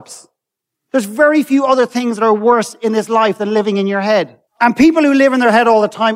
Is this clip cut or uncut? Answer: cut